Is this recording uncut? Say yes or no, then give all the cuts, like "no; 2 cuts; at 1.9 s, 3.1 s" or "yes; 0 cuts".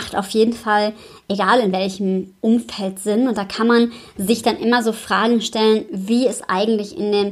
yes; 0 cuts